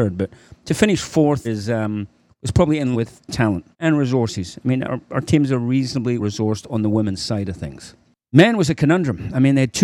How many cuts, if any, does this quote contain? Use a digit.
5